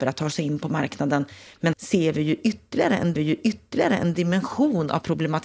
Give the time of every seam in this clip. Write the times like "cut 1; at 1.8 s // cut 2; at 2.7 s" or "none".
cut 1; at 1.7 s // cut 2; at 3.2 s